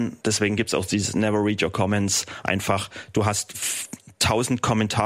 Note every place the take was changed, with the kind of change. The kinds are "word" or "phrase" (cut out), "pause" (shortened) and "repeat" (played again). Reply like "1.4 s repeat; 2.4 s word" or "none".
none